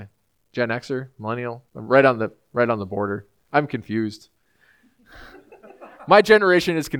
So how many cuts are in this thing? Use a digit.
2